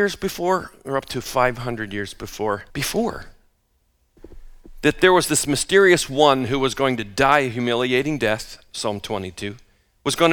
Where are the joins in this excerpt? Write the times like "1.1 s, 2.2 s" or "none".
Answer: 2.7 s